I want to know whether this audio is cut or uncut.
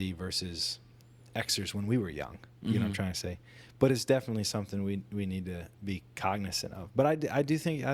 uncut